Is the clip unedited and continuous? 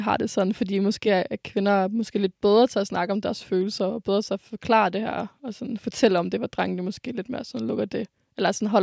yes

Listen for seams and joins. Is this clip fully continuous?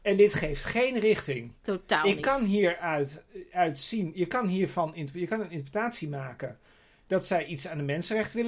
yes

